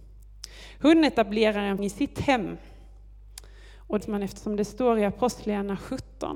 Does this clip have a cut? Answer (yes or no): yes